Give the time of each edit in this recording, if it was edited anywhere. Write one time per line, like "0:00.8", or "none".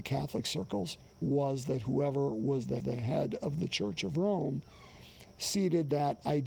0:01.1
0:02.8